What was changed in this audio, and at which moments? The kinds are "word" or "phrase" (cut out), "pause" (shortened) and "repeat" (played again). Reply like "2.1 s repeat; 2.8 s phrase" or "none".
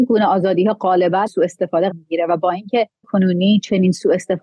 1.3 s word; 1.9 s word; 3.0 s word